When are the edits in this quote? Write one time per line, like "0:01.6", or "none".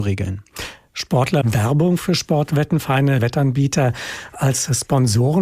0:01.4
0:03.2